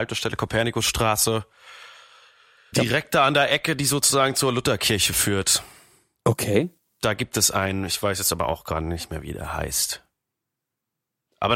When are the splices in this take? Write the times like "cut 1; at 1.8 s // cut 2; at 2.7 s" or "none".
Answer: cut 1; at 2.7 s